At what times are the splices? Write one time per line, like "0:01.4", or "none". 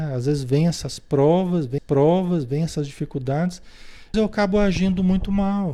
0:01.8
0:04.1